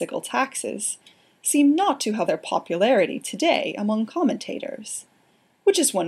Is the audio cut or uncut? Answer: cut